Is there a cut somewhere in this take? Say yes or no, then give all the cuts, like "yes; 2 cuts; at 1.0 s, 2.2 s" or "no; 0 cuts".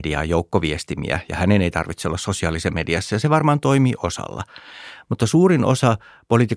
no; 0 cuts